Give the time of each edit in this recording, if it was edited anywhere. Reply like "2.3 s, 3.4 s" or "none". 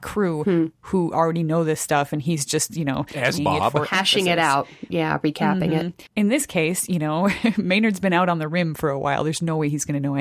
3.4 s, 6.1 s